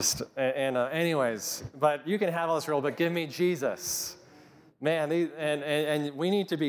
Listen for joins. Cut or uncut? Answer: uncut